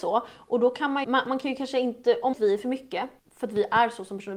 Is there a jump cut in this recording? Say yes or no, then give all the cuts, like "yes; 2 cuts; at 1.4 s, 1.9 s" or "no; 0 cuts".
yes; 3 cuts; at 1.0 s, 2.3 s, 3.2 s